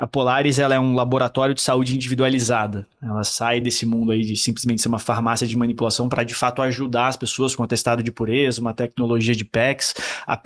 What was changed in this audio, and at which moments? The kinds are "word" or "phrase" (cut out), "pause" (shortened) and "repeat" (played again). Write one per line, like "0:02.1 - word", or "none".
none